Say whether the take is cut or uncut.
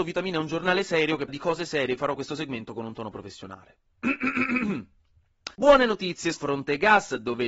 cut